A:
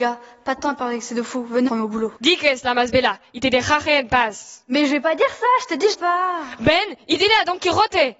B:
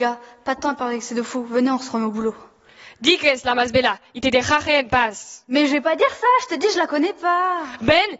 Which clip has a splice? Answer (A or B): A